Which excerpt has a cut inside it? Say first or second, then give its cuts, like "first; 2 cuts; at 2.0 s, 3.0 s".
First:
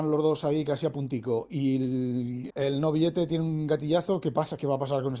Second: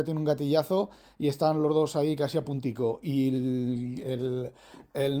first; 1 cut; at 2.5 s